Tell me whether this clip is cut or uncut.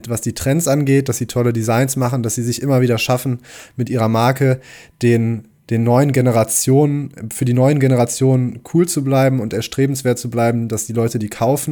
uncut